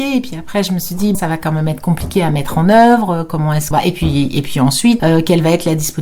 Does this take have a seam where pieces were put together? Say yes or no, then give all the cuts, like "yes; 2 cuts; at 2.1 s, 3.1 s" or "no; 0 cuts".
yes; 3 cuts; at 1.1 s, 3.7 s, 5.0 s